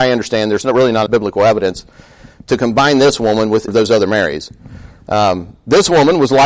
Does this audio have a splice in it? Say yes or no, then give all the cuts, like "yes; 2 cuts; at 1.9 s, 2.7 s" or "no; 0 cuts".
yes; 2 cuts; at 1.1 s, 3.7 s